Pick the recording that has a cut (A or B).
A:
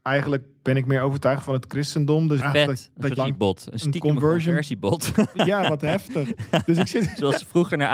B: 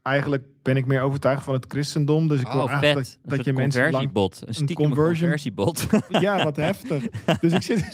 A